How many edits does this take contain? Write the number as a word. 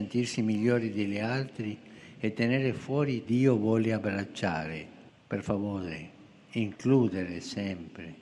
two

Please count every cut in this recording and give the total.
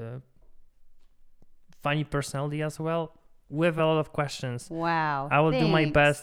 zero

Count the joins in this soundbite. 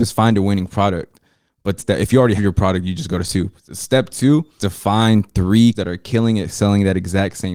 five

